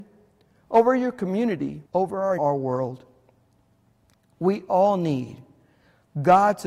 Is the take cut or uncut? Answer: cut